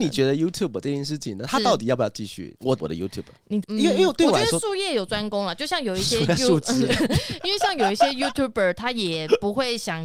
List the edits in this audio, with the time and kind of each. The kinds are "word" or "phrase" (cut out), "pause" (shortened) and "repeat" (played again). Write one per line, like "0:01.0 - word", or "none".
0:02.8 - word
0:03.6 - word